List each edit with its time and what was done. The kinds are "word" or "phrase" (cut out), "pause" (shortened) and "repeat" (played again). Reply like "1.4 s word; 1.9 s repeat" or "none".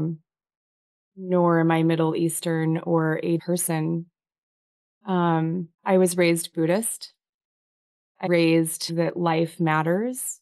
3.4 s phrase; 5.7 s pause; 8.3 s word; 8.9 s word